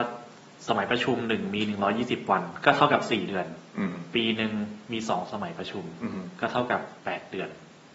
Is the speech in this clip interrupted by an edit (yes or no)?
yes